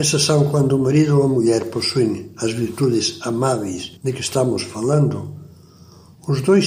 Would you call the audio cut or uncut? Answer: cut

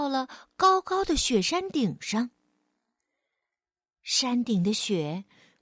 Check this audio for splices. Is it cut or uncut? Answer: uncut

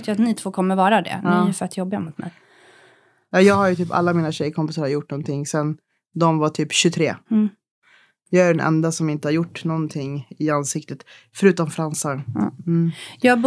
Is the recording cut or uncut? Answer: uncut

